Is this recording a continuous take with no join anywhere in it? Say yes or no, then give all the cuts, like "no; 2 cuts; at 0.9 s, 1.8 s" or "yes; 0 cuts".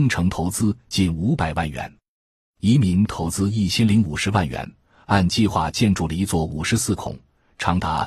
yes; 0 cuts